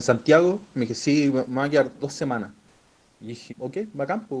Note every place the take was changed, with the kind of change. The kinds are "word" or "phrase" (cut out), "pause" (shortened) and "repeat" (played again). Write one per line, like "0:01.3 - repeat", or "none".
0:02.0 - word
0:03.5 - word